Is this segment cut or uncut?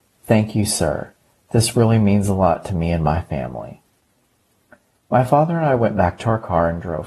uncut